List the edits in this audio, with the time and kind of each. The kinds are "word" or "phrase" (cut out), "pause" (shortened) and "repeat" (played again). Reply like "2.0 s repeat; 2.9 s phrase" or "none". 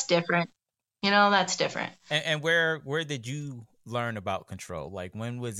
none